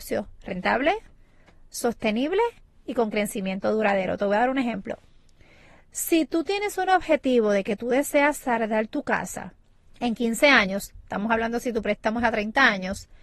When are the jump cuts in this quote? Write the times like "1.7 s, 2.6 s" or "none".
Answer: none